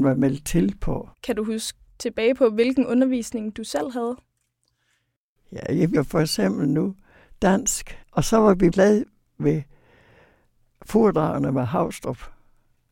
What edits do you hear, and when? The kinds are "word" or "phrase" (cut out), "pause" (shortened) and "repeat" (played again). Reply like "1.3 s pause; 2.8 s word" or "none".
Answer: 1.1 s pause; 6.0 s word; 8.0 s pause; 8.7 s word